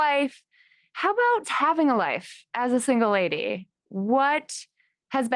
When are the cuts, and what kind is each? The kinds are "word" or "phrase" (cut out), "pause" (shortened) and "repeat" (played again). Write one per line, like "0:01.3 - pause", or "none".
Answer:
0:01.4 - word